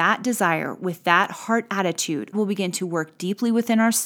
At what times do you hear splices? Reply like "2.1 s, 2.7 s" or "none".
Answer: 2.3 s